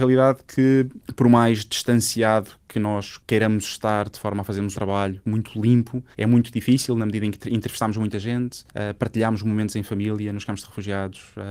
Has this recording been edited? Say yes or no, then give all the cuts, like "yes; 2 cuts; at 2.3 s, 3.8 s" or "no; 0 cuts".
yes; 3 cuts; at 4.7 s, 6.1 s, 8.7 s